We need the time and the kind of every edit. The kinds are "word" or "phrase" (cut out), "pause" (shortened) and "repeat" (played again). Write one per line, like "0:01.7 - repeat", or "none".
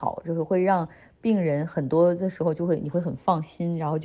none